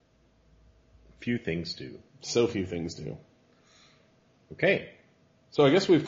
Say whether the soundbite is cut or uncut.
uncut